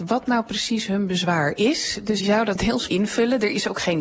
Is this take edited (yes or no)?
yes